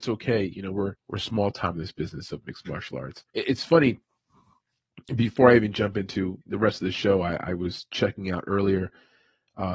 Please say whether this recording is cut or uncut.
cut